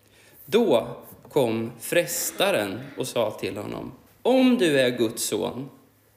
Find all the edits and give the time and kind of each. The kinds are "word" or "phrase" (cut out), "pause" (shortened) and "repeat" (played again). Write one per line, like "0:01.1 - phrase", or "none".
0:04.1 - pause